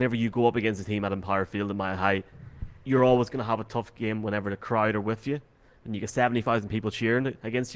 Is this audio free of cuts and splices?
yes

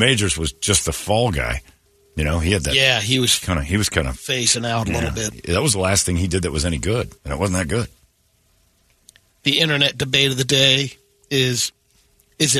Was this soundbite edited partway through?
yes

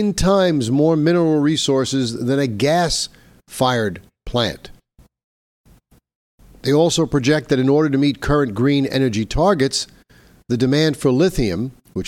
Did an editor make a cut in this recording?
no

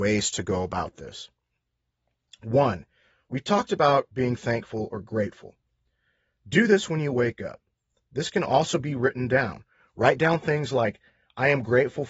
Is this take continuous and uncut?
yes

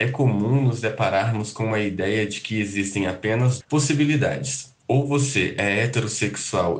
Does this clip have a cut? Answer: yes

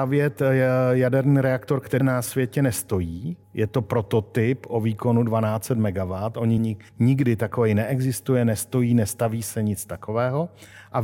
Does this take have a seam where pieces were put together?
yes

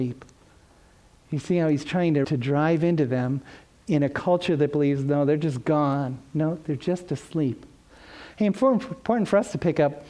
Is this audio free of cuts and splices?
no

